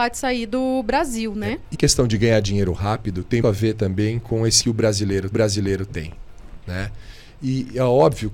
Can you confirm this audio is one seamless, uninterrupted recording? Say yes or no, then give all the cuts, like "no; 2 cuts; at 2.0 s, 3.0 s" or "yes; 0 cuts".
no; 4 cuts; at 1.7 s, 3.4 s, 4.6 s, 5.3 s